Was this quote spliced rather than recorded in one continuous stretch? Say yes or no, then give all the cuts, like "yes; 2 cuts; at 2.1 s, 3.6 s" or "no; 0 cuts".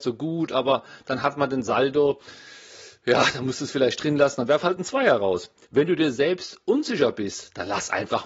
no; 0 cuts